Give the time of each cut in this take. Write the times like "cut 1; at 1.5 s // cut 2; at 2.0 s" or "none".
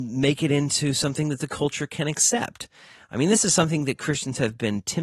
none